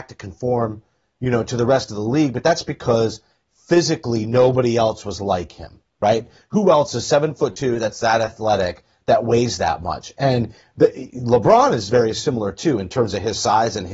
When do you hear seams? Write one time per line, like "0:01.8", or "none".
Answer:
none